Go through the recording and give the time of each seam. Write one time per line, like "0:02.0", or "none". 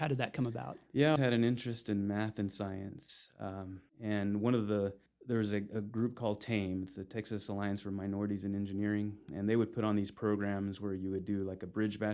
0:01.2
0:03.9

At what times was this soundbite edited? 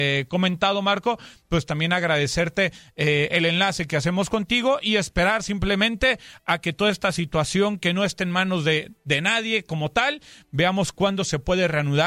none

